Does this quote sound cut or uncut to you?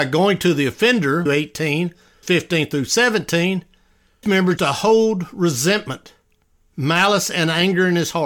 cut